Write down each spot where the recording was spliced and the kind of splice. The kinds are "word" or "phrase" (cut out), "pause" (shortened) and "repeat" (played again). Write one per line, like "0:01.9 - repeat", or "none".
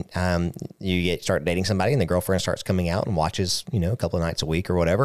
none